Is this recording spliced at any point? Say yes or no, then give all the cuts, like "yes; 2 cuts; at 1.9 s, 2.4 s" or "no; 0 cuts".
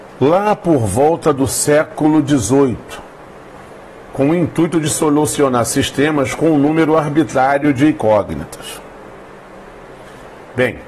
no; 0 cuts